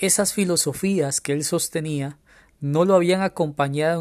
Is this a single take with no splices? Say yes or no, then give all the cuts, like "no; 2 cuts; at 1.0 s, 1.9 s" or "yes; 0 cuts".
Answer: yes; 0 cuts